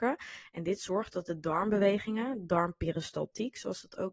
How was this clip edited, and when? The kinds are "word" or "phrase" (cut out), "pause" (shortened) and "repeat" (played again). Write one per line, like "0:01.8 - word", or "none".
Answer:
none